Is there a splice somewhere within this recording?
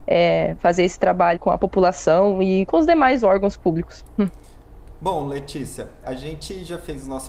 yes; 3 cuts; at 1.4 s, 2.7 s, 6.0 s

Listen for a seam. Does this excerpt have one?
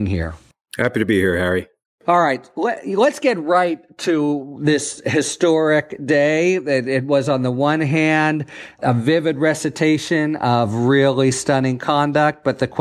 no; 0 cuts

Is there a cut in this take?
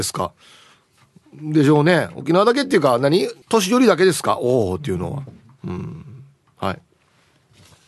yes; 1 cut; at 3.4 s

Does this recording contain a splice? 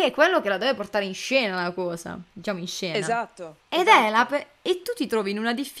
yes; 2 cuts; at 2.3 s, 3.6 s

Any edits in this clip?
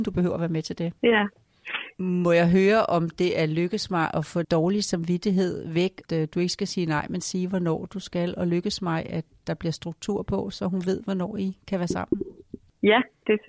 yes; 3 cuts; at 1.0 s, 4.4 s, 6.1 s

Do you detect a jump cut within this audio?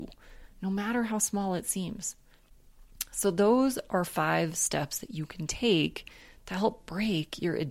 no; 0 cuts

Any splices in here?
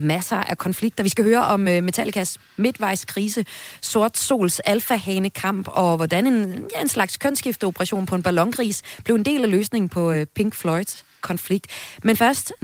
no; 0 cuts

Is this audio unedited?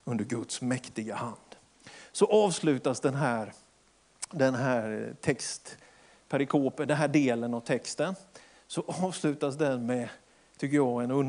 yes; 0 cuts

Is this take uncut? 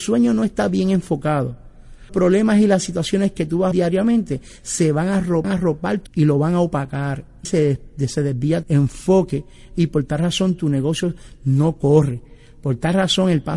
no; 6 cuts; at 2.1 s, 3.7 s, 5.4 s, 6.1 s, 7.4 s, 8.6 s

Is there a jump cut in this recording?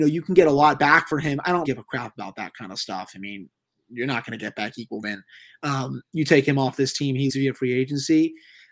yes; 3 cuts; at 1.6 s, 5.0 s, 7.3 s

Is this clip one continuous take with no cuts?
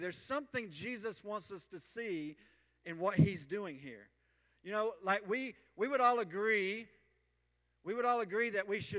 yes; 0 cuts

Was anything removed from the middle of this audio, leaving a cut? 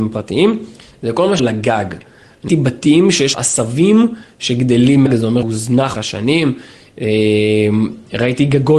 yes; 6 cuts; at 1.4 s, 2.5 s, 3.3 s, 5.1 s, 5.4 s, 5.9 s

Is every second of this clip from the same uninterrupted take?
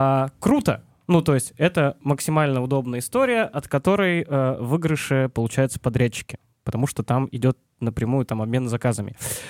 yes; 0 cuts

